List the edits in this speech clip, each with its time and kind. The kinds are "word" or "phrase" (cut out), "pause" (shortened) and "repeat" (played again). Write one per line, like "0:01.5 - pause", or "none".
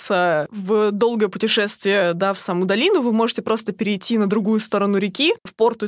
none